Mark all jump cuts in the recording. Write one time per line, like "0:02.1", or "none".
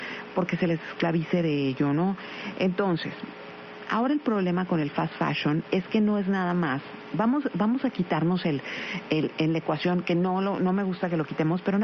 none